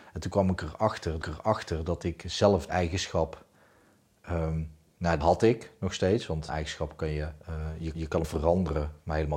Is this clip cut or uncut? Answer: cut